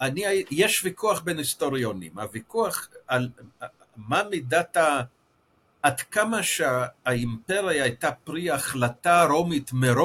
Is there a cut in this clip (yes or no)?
no